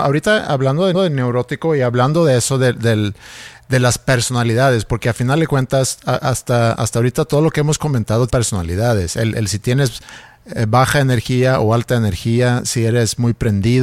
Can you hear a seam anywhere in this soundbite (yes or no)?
yes